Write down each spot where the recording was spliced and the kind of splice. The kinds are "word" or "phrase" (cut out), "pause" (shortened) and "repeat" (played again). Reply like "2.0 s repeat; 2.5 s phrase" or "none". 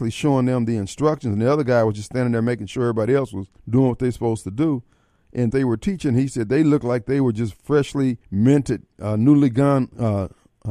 3.6 s pause; 5.5 s phrase; 8.2 s pause